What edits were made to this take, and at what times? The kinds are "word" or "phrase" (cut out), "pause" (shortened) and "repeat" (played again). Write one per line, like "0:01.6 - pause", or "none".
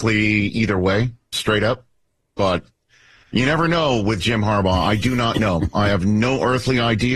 0:01.3 - word